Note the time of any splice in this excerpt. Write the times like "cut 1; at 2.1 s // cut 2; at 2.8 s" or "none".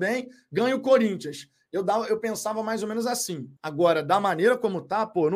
cut 1; at 3.6 s